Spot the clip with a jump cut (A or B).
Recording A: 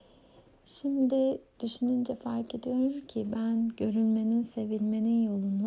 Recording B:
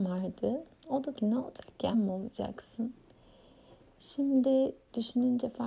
B